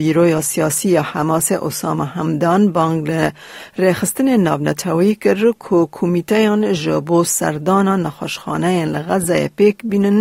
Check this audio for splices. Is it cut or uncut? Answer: uncut